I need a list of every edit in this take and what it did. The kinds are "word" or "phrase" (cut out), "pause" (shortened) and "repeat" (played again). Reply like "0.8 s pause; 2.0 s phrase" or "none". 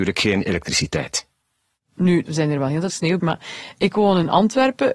2.3 s word; 2.9 s word; 3.2 s word